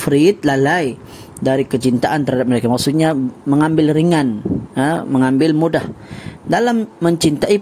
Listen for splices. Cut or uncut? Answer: uncut